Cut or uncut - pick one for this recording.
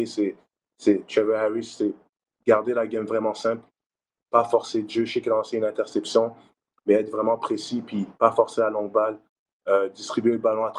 uncut